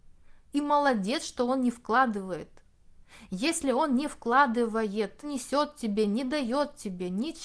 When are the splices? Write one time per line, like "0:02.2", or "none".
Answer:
0:05.2